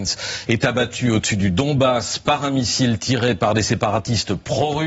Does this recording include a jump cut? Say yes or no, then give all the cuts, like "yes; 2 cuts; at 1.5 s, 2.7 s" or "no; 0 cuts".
no; 0 cuts